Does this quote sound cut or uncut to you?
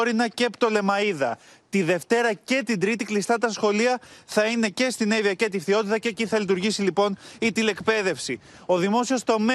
uncut